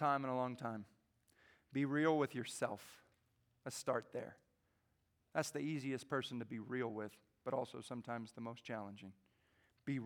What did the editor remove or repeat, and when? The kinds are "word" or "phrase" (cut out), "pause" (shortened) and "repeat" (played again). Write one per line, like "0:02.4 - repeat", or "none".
none